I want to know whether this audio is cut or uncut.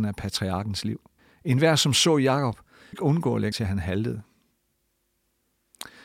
cut